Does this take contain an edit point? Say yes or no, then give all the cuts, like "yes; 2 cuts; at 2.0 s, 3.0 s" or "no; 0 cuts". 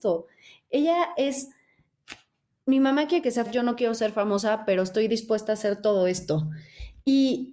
yes; 1 cut; at 3.5 s